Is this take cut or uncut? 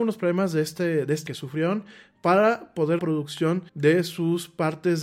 cut